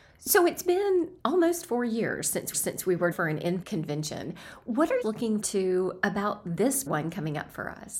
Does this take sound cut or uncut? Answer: cut